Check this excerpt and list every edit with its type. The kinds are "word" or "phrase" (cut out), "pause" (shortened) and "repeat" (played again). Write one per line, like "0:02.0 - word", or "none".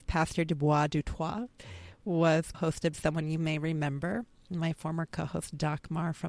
0:02.5 - word
0:02.9 - word